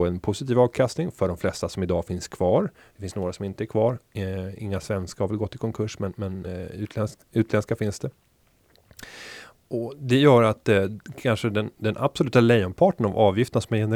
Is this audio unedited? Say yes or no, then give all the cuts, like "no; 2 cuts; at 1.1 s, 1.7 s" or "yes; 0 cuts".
yes; 0 cuts